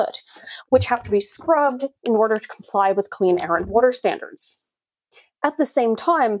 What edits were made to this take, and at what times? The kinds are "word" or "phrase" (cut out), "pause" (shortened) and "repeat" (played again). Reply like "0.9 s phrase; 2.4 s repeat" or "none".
none